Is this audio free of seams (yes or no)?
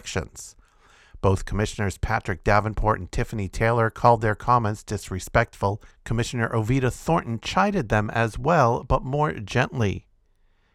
no